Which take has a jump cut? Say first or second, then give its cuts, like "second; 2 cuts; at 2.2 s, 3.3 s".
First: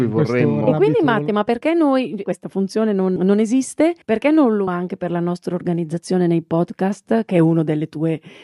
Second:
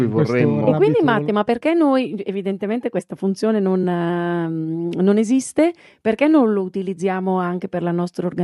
first; 4 cuts; at 2.2 s, 3.2 s, 4.0 s, 4.7 s